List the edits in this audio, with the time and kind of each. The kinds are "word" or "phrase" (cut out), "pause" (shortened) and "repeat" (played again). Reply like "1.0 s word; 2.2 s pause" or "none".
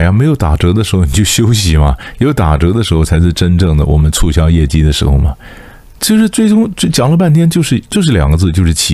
none